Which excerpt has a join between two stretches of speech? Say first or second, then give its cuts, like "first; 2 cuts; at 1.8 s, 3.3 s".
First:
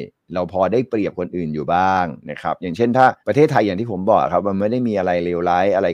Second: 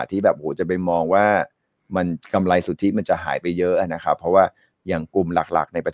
first; 2 cuts; at 2.2 s, 3.2 s